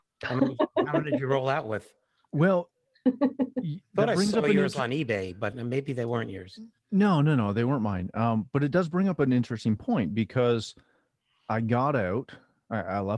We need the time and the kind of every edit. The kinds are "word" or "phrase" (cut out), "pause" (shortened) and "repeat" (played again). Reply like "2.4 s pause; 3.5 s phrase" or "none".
none